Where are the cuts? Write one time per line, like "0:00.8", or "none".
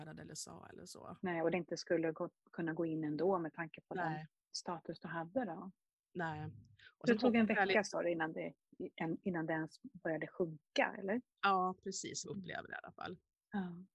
0:01.5
0:11.3
0:12.2